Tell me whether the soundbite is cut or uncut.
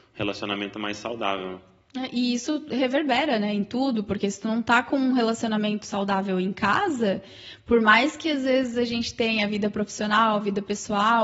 uncut